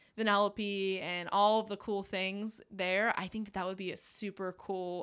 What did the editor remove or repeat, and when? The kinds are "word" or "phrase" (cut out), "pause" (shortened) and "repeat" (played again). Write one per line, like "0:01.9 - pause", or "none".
none